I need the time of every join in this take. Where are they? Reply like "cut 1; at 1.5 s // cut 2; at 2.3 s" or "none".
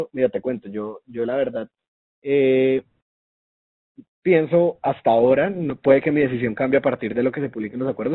none